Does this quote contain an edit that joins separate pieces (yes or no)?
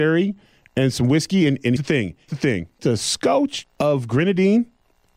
yes